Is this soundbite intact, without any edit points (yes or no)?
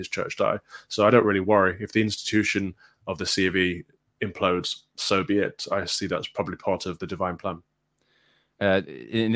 yes